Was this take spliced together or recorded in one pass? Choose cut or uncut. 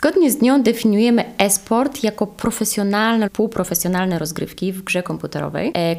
cut